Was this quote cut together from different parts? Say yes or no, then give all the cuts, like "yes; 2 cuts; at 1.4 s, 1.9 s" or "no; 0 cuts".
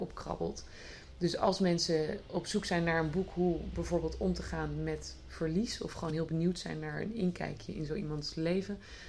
no; 0 cuts